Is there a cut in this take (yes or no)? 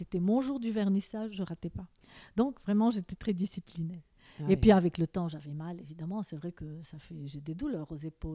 yes